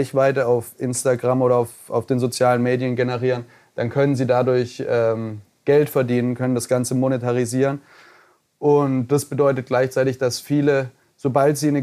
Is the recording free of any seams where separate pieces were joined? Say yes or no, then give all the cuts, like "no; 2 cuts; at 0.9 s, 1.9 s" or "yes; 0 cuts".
yes; 0 cuts